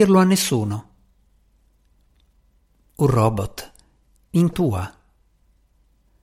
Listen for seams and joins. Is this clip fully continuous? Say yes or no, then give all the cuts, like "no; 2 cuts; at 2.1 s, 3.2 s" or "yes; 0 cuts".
no; 1 cut; at 4.5 s